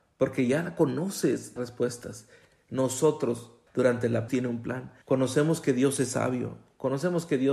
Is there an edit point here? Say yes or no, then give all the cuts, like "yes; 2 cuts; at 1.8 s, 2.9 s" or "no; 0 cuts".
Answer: yes; 4 cuts; at 1.6 s, 3.7 s, 4.3 s, 5.0 s